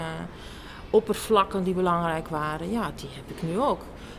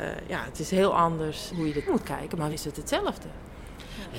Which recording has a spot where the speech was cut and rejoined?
second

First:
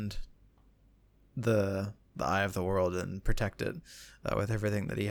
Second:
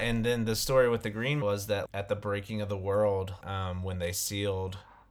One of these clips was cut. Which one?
second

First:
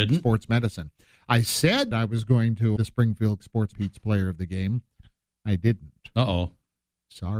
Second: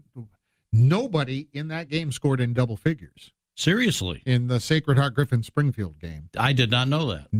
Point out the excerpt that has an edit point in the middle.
first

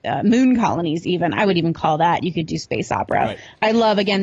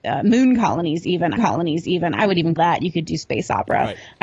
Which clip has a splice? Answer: second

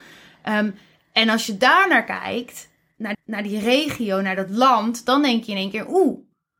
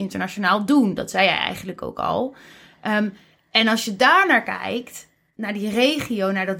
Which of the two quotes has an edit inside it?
first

